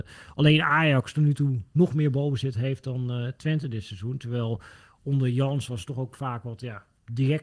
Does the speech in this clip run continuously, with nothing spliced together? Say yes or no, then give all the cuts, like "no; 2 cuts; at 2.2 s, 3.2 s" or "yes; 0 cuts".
yes; 0 cuts